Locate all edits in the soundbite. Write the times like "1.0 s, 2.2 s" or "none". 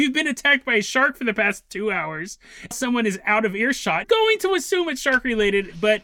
2.7 s, 4.0 s